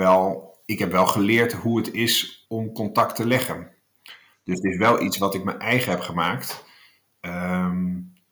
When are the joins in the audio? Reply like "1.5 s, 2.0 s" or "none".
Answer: 2.4 s